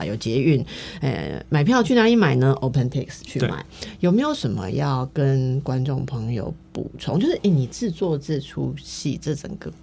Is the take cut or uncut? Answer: uncut